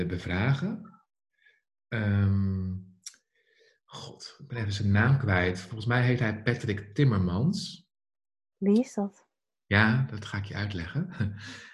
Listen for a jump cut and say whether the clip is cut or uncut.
uncut